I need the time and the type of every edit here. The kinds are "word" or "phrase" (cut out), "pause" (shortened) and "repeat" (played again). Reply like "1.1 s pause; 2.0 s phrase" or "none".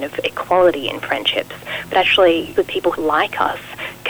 2.6 s phrase; 2.9 s phrase